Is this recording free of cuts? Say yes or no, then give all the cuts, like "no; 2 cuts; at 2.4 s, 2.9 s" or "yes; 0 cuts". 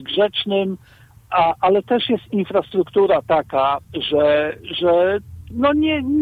no; 1 cut; at 3.8 s